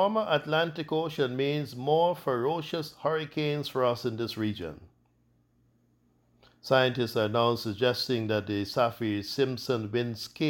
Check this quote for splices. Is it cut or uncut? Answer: uncut